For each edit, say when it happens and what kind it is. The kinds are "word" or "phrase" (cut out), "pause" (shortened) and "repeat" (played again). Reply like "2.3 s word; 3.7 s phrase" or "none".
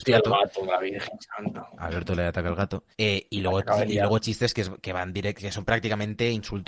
2.9 s pause